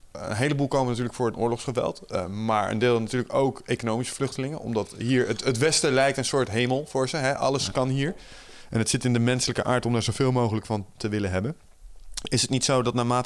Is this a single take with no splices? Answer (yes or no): no